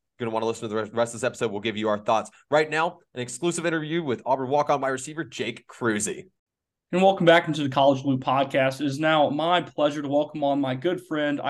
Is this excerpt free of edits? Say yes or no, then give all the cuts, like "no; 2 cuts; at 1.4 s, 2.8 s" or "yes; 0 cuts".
yes; 0 cuts